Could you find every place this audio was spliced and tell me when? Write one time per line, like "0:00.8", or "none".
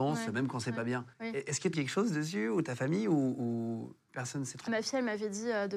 0:01.1
0:01.7
0:04.7